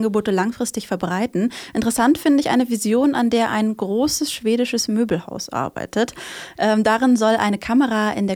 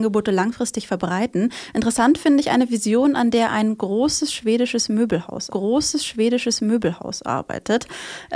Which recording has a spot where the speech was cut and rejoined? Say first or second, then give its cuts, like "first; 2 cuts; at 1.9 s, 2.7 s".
second; 1 cut; at 5.5 s